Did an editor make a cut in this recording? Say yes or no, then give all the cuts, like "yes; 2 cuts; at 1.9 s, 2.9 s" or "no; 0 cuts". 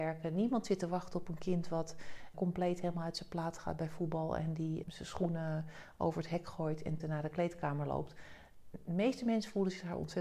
yes; 3 cuts; at 2.3 s, 4.8 s, 7.0 s